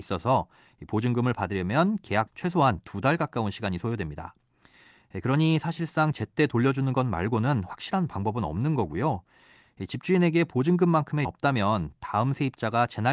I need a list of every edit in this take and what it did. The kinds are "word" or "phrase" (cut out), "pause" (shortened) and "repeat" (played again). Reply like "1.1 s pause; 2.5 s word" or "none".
2.3 s word; 6.1 s word; 11.2 s word